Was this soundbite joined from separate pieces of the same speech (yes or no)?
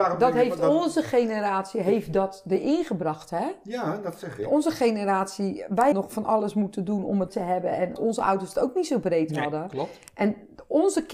yes